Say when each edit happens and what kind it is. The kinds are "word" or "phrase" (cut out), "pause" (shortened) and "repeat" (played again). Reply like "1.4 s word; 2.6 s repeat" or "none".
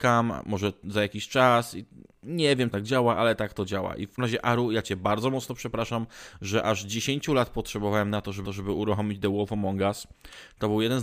2.7 s phrase; 4.2 s word; 8.4 s repeat